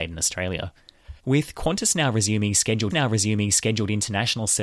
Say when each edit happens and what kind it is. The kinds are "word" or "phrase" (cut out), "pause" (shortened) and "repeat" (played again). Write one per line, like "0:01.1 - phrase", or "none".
0:01.2 - pause
0:02.9 - repeat